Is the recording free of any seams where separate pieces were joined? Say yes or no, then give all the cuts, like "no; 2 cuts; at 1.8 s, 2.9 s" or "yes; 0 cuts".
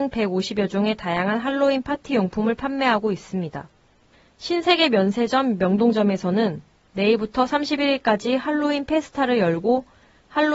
yes; 0 cuts